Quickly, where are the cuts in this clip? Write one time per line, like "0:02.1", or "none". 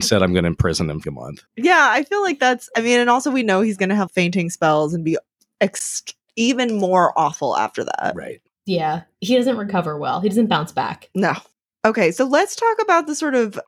0:01.0
0:01.5
0:04.1
0:08.5